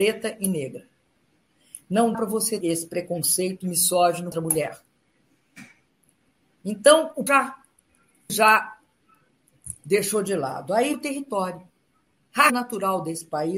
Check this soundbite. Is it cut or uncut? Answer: cut